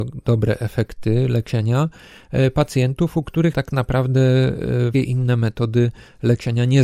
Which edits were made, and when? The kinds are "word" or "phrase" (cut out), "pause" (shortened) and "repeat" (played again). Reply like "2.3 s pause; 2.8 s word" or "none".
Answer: 3.5 s word; 4.9 s word